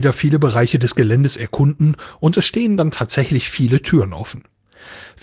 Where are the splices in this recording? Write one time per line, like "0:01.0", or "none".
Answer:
none